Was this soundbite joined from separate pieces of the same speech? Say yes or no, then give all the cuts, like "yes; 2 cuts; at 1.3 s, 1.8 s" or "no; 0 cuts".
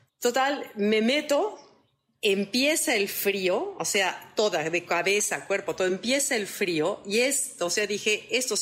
no; 0 cuts